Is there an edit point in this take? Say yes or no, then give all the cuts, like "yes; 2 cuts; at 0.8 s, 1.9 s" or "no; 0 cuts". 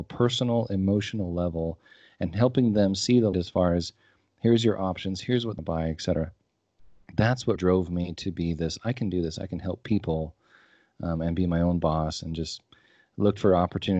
yes; 3 cuts; at 3.3 s, 5.6 s, 7.6 s